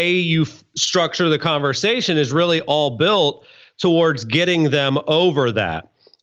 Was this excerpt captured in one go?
yes; 0 cuts

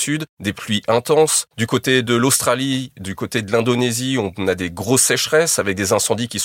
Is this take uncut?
yes; 0 cuts

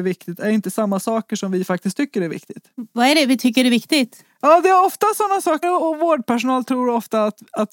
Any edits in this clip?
yes; 1 cut; at 5.6 s

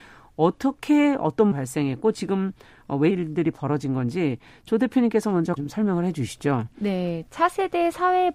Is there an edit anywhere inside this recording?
yes; 3 cuts; at 1.5 s, 3.1 s, 5.6 s

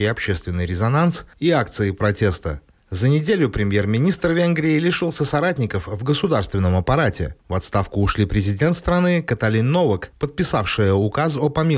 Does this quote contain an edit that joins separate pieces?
no; 0 cuts

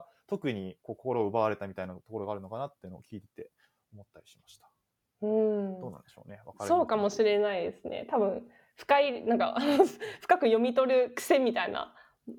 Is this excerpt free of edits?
yes; 0 cuts

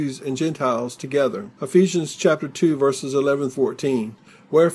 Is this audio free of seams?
no; 1 cut; at 3.5 s

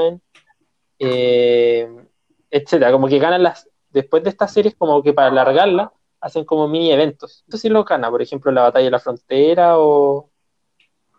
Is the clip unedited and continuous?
no; 1 cut; at 7.5 s

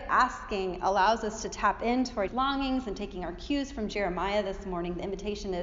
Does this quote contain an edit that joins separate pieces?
yes; 1 cut; at 2.3 s

